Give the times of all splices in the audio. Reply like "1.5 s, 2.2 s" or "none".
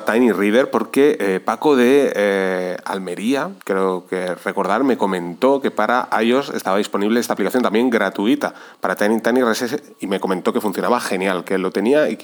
3.6 s